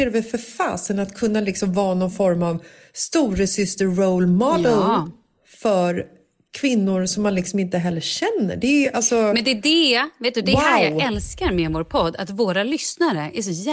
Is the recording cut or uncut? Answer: uncut